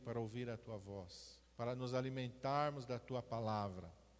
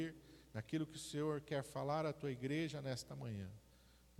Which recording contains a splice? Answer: first; 1 cut; at 1.4 s

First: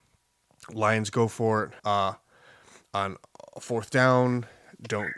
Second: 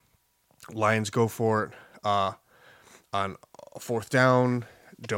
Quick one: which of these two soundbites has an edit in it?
first; 1 cut; at 1.8 s

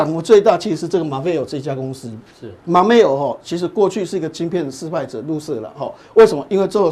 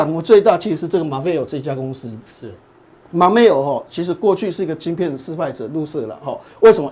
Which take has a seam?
first; 1 cut; at 2.6 s

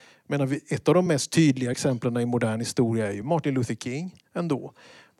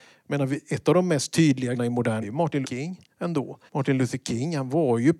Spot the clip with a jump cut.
second; 4 cuts; at 1.7 s, 2.2 s, 2.6 s, 3.7 s

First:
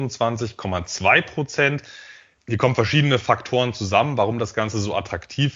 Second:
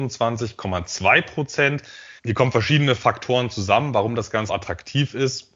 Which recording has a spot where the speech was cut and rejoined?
second; 2 cuts; at 2.2 s, 4.5 s

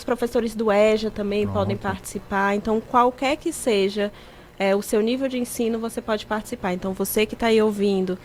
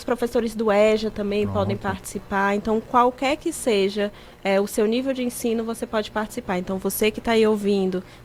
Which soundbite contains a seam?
second; 1 cut; at 4.3 s

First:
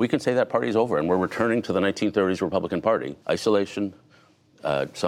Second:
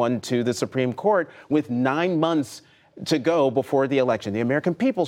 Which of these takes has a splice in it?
first; 1 cut; at 3.2 s

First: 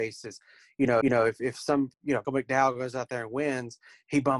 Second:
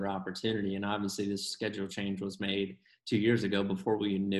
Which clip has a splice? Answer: first; 3 cuts; at 1.0 s, 1.9 s, 2.2 s

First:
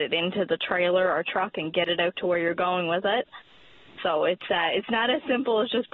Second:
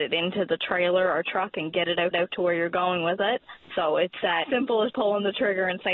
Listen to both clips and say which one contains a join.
second; 4 cuts; at 2.1 s, 3.6 s, 4.4 s, 4.9 s

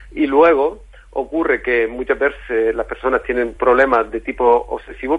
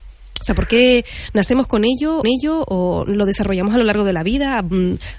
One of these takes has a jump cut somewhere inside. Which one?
second; 1 cut; at 2.2 s

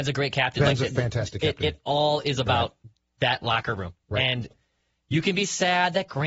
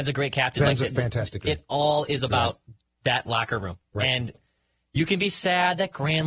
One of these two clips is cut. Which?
second; 1 cut; at 1.4 s

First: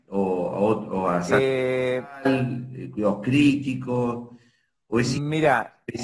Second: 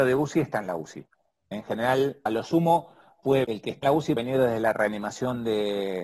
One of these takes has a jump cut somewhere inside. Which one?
second; 4 cuts; at 2.3 s, 3.4 s, 3.8 s, 4.2 s

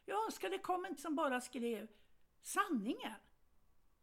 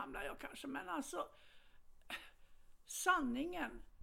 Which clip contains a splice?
first; 1 cut; at 1.0 s

